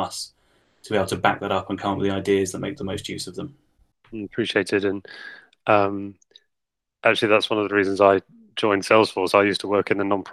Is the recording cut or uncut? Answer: uncut